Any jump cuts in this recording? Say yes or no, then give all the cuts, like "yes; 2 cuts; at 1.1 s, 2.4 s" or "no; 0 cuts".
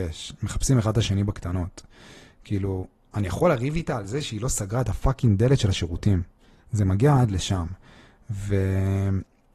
no; 0 cuts